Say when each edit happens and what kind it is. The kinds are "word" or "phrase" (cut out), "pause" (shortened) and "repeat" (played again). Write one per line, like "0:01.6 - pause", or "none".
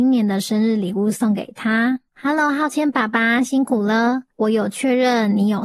0:02.1 - pause
0:04.3 - pause